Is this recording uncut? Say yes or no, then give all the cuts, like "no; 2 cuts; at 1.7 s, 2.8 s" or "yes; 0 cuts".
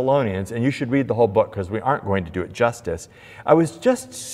yes; 0 cuts